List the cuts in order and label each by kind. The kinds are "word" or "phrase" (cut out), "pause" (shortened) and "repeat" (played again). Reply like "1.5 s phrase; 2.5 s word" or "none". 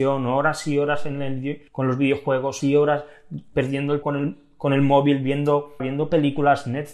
1.7 s pause; 2.6 s word; 4.0 s word; 5.8 s word